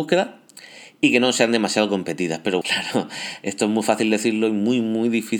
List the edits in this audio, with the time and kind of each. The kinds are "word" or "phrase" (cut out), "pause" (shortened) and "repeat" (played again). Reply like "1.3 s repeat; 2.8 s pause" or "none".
2.6 s word